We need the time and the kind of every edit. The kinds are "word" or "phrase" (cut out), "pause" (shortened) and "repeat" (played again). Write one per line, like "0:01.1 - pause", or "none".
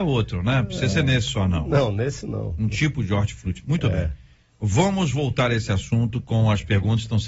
none